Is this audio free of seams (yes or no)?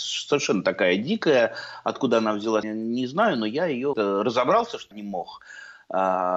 no